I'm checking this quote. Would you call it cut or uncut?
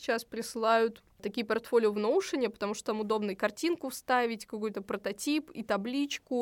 uncut